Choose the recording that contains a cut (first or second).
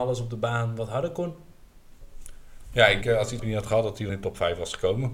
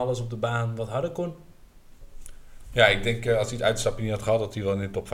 first